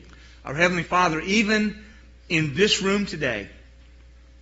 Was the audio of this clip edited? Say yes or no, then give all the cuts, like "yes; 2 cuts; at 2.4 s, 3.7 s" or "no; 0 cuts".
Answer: no; 0 cuts